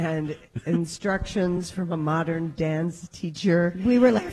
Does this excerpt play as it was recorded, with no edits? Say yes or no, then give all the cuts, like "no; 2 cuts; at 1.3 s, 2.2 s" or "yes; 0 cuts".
yes; 0 cuts